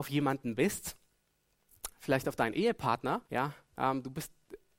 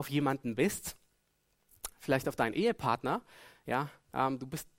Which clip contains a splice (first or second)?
first